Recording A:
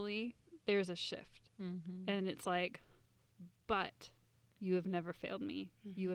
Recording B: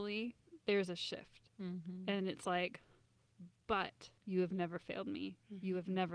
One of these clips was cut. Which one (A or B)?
B